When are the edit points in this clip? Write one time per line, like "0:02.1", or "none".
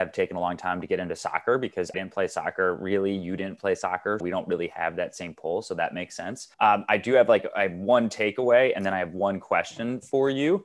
0:01.9
0:04.2
0:06.5